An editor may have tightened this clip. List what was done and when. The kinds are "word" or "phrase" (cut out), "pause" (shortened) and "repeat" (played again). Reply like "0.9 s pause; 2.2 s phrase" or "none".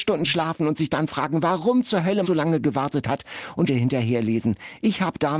2.2 s word; 3.7 s phrase